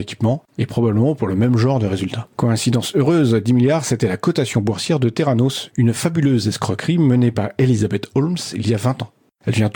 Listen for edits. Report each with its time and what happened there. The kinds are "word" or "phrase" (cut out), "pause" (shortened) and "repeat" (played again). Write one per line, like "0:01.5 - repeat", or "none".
0:02.3 - pause